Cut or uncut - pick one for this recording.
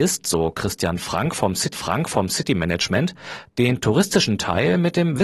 cut